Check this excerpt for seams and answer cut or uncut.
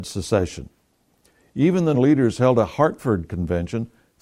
cut